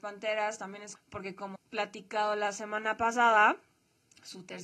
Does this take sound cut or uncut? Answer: cut